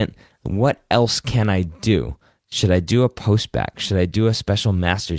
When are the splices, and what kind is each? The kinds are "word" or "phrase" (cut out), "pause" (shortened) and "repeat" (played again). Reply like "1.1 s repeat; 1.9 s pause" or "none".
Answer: none

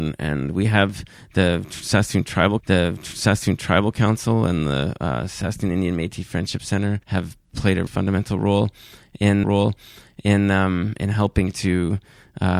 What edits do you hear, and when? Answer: 2.6 s repeat; 7.0 s pause; 7.9 s word; 9.4 s repeat

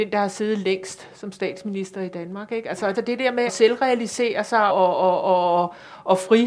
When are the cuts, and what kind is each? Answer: 2.9 s phrase; 3.5 s word; 4.7 s word

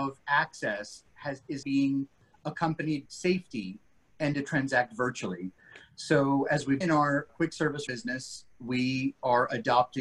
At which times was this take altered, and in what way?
1.6 s word; 3.1 s word; 4.3 s word; 6.8 s word; 7.3 s word; 7.9 s word

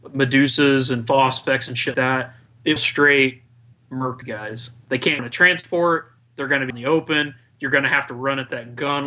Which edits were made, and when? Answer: 1.9 s word; 2.8 s word; 4.2 s word; 5.2 s word; 6.7 s word

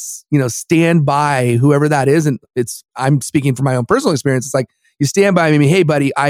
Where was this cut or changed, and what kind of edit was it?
none

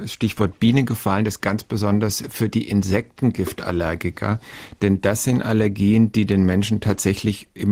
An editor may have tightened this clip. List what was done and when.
1.4 s word

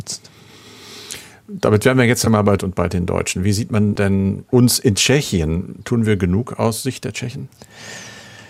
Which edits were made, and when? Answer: 2.6 s word

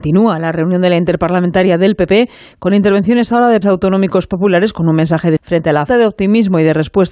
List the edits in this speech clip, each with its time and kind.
3.6 s word; 5.4 s word; 5.9 s word

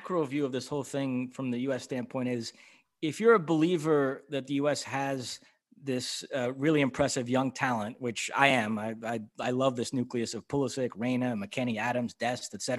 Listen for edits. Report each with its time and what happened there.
none

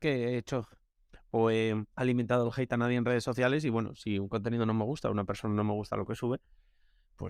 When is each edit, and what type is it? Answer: 1.9 s pause

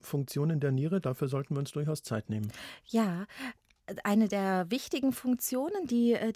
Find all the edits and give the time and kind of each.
none

